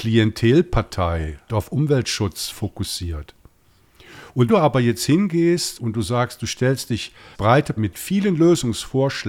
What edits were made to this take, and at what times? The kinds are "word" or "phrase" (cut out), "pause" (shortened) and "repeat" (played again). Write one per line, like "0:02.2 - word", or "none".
0:01.5 - word
0:02.5 - word
0:04.5 - word
0:05.8 - word
0:07.3 - word
0:07.8 - word